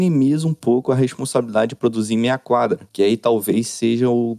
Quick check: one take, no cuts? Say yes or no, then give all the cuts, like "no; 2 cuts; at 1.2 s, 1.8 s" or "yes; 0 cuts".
yes; 0 cuts